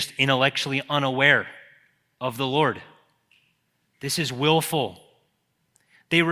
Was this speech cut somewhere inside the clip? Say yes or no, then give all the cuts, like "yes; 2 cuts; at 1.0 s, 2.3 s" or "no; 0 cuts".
no; 0 cuts